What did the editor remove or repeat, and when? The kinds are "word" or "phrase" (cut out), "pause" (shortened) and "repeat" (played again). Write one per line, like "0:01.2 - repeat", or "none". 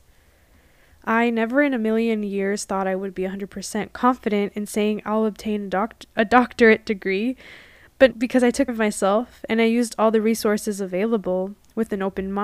0:08.1 - word
0:08.7 - word